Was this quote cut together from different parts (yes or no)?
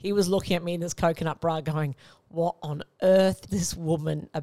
yes